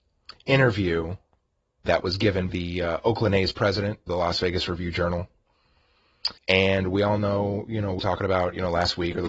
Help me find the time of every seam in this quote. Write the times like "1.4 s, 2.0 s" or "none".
1.8 s, 2.5 s, 4.1 s, 6.4 s, 8.0 s